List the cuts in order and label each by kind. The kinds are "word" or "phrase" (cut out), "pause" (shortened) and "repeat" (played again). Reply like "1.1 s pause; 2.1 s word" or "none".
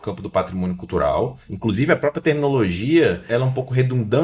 none